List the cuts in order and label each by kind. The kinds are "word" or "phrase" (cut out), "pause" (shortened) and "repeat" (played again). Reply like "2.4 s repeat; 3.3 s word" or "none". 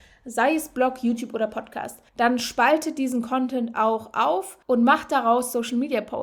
2.1 s pause; 4.6 s pause